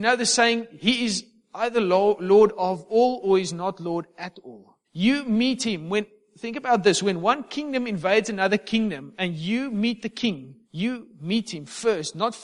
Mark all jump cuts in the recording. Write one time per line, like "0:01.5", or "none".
0:04.8
0:10.6